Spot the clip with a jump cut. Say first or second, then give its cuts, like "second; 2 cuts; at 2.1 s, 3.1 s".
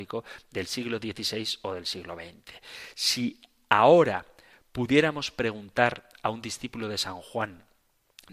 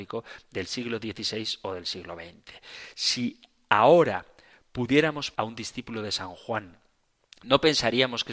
second; 1 cut; at 5.3 s